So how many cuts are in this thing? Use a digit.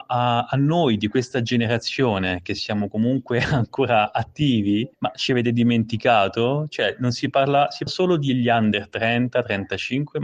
2